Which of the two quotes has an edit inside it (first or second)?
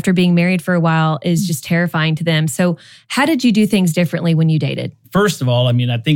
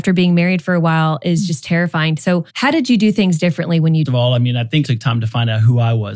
second